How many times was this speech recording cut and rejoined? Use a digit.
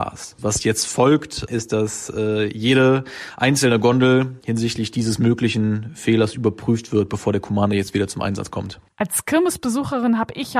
1